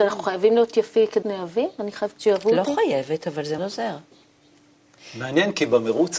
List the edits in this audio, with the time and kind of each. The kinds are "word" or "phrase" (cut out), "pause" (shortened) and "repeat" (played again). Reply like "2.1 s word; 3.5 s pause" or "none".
1.2 s word; 2.1 s phrase; 3.6 s word